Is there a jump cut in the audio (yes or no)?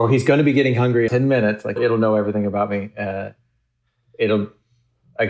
yes